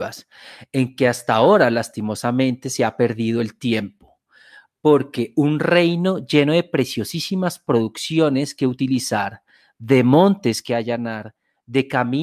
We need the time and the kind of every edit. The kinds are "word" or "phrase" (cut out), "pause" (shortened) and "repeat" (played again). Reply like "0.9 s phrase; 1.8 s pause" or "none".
none